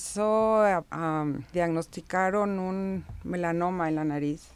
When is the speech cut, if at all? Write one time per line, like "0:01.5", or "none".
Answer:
0:01.5